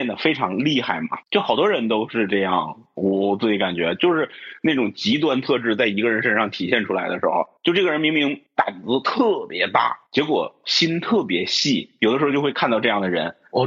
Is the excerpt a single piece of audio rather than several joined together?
no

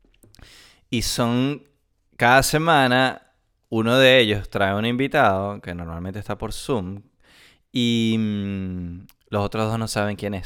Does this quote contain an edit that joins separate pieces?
no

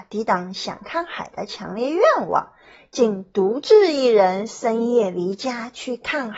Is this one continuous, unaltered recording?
yes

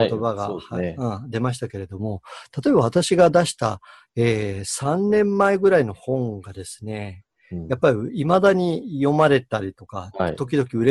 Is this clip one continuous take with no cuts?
yes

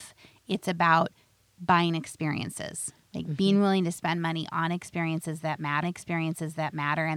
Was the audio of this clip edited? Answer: yes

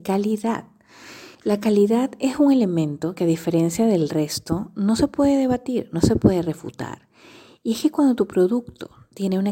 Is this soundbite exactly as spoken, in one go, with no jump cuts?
no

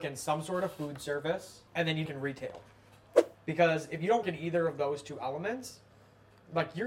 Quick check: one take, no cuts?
no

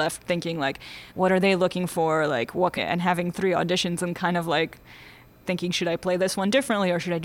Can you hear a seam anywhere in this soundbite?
yes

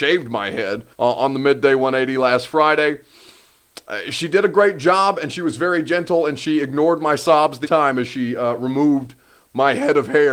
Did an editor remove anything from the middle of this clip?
yes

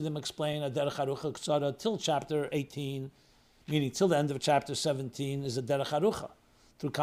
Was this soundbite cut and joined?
no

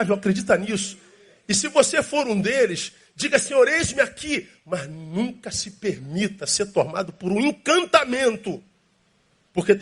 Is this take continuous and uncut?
yes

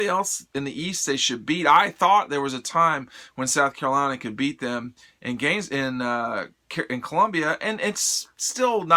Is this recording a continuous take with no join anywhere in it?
yes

